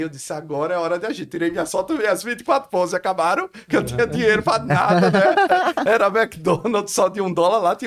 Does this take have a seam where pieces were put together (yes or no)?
no